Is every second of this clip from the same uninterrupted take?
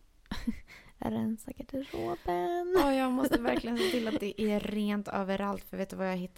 yes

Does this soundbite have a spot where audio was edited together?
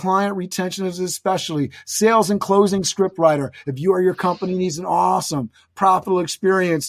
no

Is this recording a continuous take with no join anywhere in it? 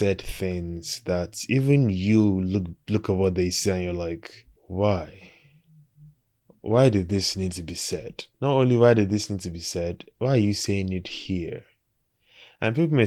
no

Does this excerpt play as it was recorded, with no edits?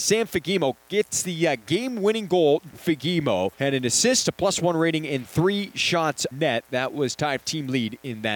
no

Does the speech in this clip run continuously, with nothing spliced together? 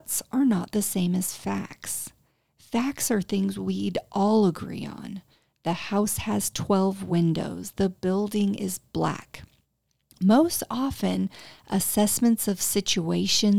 yes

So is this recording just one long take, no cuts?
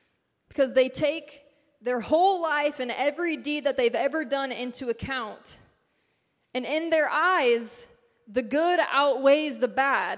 yes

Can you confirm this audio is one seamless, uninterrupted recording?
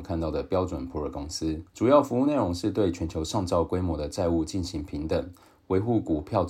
no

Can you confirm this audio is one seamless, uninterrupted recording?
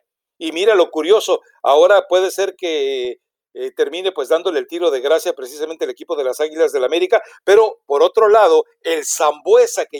yes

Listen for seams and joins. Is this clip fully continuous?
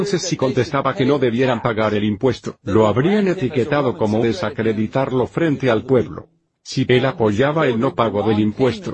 no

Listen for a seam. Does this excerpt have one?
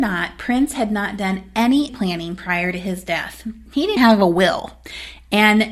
yes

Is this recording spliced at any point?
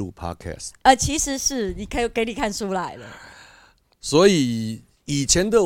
no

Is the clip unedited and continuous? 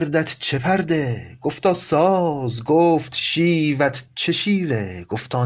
yes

